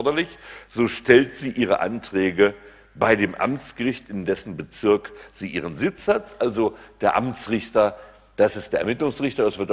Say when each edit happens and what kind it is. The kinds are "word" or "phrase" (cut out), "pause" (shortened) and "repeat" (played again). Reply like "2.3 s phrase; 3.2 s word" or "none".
none